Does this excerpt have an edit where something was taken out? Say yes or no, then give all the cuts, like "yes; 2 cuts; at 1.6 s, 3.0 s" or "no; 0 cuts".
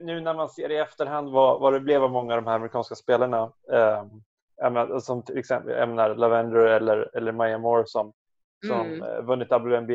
no; 0 cuts